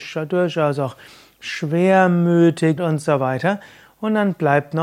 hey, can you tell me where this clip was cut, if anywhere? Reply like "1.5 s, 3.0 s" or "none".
2.8 s

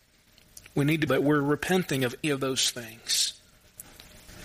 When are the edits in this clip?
1.1 s, 2.2 s

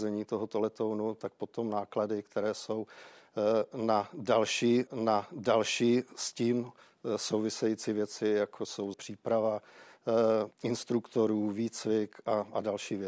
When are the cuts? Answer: 4.9 s, 8.9 s, 10.5 s

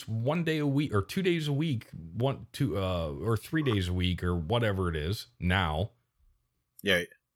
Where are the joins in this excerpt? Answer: none

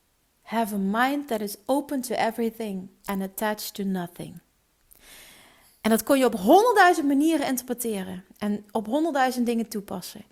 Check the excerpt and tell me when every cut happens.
none

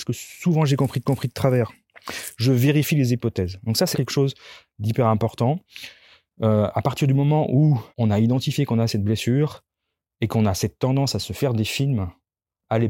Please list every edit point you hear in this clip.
1.1 s, 3.9 s, 7.9 s

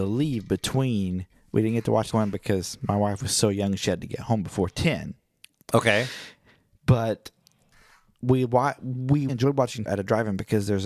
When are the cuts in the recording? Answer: 2.1 s, 9.3 s, 9.9 s

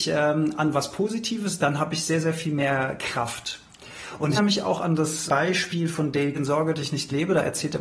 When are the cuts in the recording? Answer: 1.6 s, 4.4 s, 5.3 s, 6.3 s

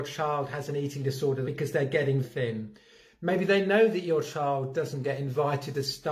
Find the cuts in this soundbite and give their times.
1.4 s, 2.2 s

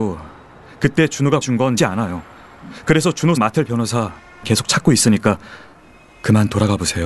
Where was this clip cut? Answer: 1.4 s, 1.8 s, 3.4 s, 4.4 s

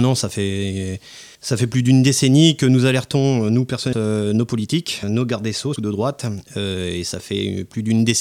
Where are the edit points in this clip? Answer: 1.3 s, 3.9 s, 5.0 s, 5.8 s

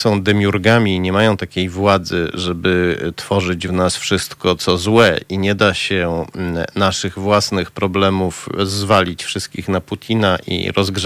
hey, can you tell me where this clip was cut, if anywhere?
none

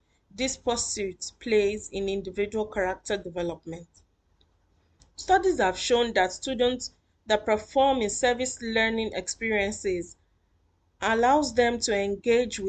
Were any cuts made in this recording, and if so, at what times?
4.3 s

